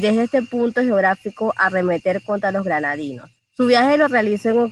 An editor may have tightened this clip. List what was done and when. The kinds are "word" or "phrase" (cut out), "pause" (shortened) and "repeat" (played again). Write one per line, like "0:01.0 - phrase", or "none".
0:03.4 - pause